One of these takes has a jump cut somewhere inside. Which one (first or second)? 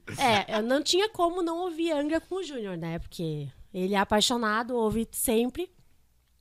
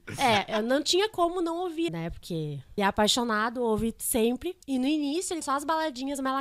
second